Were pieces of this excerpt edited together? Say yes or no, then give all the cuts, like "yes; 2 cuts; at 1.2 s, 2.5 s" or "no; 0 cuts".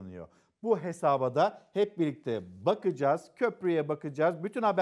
no; 0 cuts